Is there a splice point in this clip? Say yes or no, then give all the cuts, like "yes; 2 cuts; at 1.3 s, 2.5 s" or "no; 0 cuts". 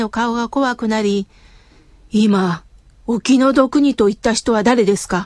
no; 0 cuts